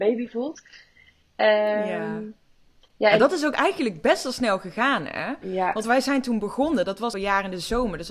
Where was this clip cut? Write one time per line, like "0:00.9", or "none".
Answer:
0:07.1